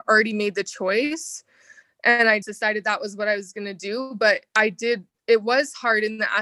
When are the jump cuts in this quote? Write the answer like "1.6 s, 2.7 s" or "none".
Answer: 2.4 s